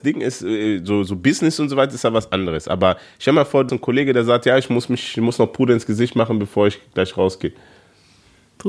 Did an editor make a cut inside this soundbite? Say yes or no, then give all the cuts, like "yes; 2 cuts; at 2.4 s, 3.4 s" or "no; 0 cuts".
yes; 1 cut; at 3.7 s